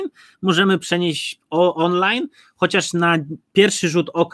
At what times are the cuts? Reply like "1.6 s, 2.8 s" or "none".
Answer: none